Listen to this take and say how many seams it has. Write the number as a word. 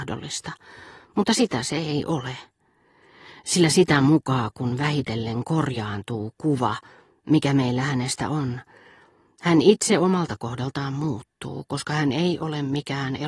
zero